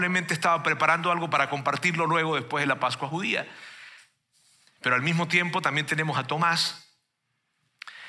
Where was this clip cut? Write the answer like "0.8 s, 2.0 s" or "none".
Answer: none